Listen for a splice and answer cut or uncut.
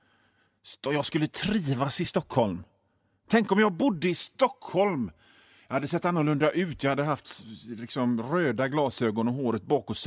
uncut